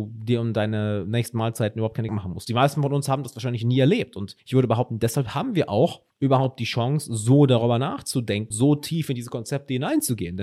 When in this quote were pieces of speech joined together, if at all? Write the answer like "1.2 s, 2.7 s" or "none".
2.1 s, 4.4 s, 6.1 s, 8.5 s